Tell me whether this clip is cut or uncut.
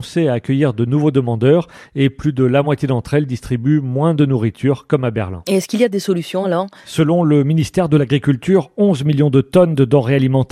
uncut